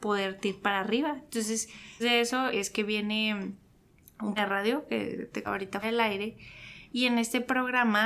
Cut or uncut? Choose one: cut